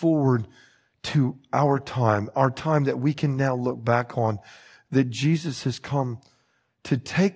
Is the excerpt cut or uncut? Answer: uncut